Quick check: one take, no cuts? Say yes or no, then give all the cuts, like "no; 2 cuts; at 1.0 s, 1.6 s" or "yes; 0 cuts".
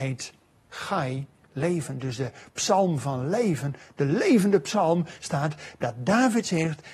yes; 0 cuts